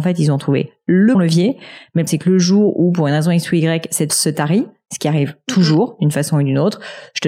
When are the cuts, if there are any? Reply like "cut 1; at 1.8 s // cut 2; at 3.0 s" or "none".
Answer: cut 1; at 1.1 s // cut 2; at 2.1 s // cut 3; at 4.1 s